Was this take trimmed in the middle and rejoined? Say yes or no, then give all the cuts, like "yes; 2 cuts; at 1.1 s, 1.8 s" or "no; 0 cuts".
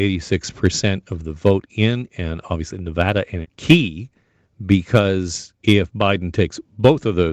yes; 2 cuts; at 3.4 s, 5.6 s